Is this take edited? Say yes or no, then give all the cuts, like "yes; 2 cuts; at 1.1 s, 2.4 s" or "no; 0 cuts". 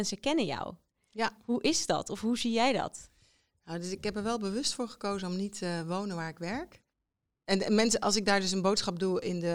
no; 0 cuts